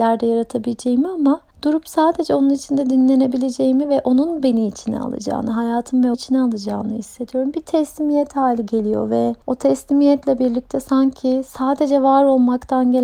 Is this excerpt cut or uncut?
cut